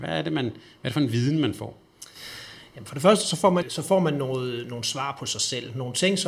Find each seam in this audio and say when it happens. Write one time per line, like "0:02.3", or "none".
0:03.6